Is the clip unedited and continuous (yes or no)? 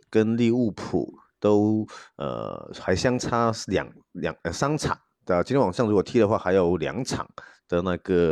yes